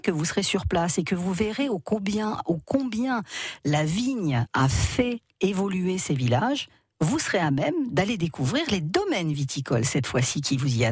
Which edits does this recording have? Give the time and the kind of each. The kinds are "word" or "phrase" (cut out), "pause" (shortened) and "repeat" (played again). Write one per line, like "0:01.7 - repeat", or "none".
0:04.5 - word